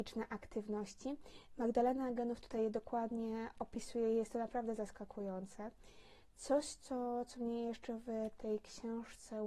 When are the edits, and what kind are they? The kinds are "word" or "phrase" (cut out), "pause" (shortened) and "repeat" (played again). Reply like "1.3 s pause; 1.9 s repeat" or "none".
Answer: none

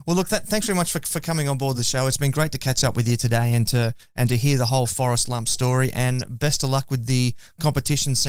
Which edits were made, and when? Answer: none

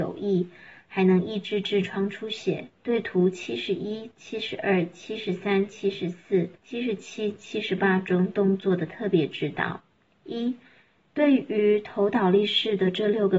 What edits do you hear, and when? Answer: 2.8 s pause; 6.6 s pause

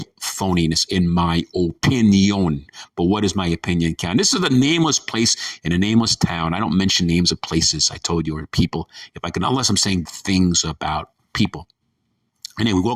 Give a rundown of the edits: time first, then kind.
10.1 s word

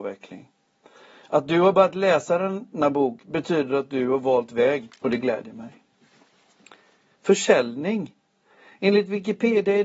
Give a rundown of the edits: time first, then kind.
none

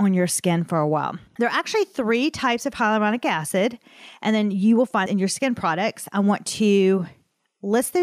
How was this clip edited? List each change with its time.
1.3 s pause; 5.1 s word

